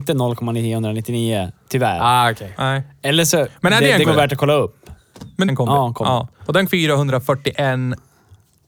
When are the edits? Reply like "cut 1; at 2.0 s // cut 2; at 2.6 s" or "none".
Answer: cut 1; at 4.0 s // cut 2; at 5.5 s // cut 3; at 6.3 s // cut 4; at 6.7 s